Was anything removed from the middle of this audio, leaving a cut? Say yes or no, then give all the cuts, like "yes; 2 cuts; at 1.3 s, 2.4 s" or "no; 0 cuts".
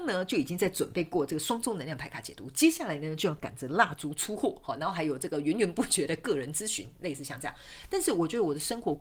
yes; 1 cut; at 4.8 s